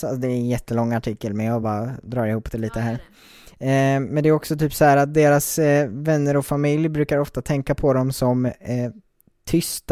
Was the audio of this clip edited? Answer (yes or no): no